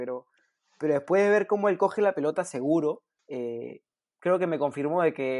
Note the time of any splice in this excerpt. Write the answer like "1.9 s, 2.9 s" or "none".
3.2 s